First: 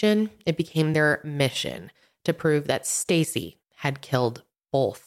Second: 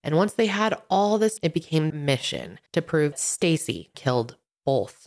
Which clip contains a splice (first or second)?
second